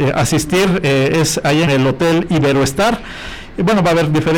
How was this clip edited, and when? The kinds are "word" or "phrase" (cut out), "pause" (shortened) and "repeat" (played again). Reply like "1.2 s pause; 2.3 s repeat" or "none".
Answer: 1.7 s phrase